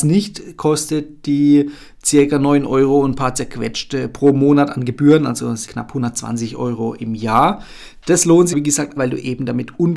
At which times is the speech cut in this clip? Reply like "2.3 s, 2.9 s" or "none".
5.7 s, 8.5 s, 9.0 s